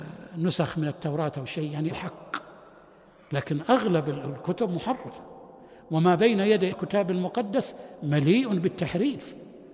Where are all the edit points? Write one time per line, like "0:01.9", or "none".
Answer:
0:01.9
0:06.7